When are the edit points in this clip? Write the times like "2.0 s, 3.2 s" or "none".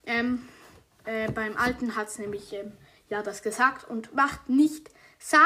none

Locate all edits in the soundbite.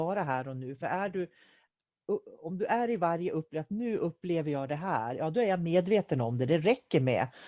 none

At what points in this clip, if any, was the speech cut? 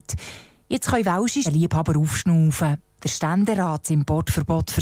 1.4 s, 3.8 s

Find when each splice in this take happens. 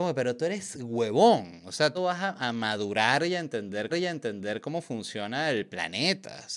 1.9 s, 3.9 s

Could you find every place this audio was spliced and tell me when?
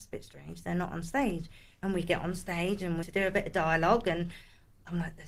3.0 s

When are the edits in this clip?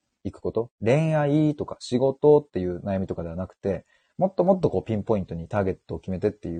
none

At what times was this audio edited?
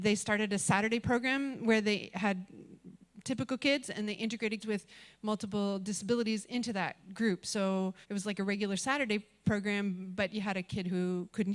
4.6 s, 8.0 s

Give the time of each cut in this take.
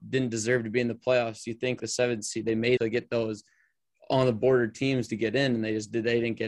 1.8 s, 2.8 s

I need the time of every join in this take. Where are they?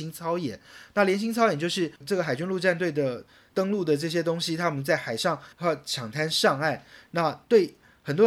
2.0 s, 5.5 s

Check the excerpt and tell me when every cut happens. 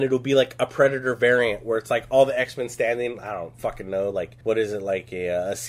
4.4 s

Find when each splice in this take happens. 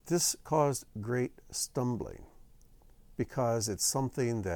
none

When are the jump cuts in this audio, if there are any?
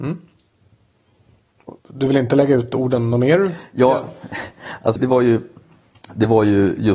1.8 s, 5.0 s

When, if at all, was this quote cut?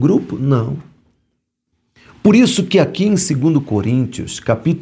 none

